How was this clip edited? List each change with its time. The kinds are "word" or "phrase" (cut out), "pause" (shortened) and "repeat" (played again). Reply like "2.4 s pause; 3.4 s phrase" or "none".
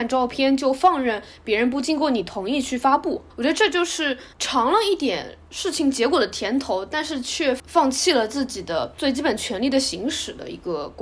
3.3 s pause; 4.3 s pause